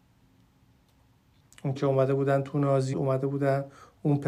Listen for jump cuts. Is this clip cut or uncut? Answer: cut